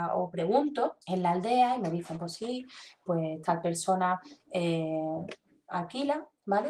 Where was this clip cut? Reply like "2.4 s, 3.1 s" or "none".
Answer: 1.0 s